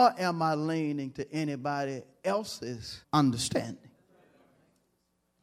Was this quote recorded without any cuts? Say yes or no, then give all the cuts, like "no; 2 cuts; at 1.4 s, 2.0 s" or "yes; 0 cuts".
no; 1 cut; at 3.0 s